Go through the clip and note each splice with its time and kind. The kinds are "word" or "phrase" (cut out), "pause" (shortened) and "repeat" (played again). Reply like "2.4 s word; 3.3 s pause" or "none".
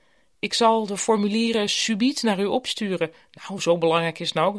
none